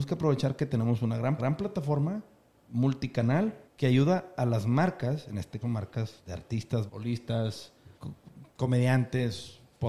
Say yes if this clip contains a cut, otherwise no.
yes